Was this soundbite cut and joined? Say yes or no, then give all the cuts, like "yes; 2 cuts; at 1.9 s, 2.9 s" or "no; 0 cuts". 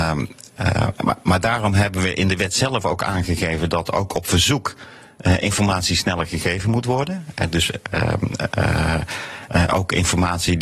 no; 0 cuts